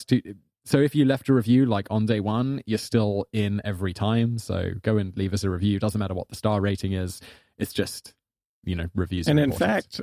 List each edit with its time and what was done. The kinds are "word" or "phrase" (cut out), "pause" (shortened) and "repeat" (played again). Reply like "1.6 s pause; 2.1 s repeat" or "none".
none